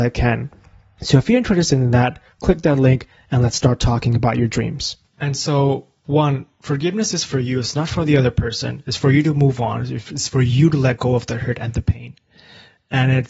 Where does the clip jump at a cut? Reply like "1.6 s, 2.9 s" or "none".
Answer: none